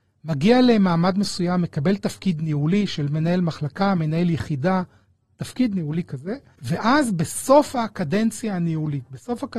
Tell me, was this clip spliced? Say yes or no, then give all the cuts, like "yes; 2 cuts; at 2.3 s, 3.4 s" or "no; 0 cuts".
yes; 1 cut; at 6.5 s